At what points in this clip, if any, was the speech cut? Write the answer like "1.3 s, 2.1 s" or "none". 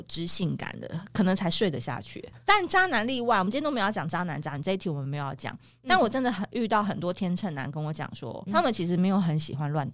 8.5 s